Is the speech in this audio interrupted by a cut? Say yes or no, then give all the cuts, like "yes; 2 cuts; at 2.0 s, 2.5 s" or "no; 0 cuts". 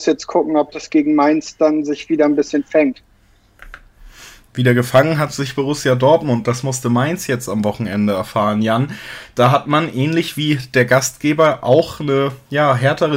no; 0 cuts